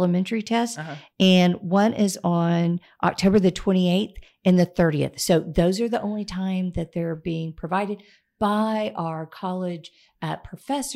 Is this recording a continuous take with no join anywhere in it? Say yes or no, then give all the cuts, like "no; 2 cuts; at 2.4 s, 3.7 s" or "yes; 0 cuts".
yes; 0 cuts